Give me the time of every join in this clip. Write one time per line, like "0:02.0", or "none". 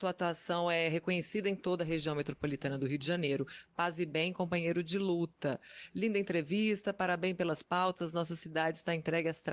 none